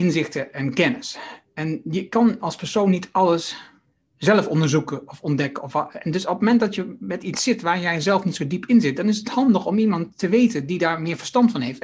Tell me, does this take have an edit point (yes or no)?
no